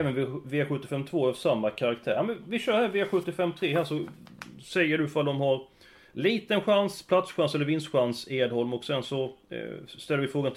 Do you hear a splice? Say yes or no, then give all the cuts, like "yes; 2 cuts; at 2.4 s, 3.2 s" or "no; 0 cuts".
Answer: no; 0 cuts